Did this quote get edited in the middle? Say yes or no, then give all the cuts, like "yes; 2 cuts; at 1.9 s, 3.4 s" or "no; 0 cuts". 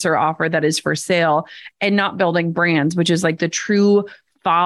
no; 0 cuts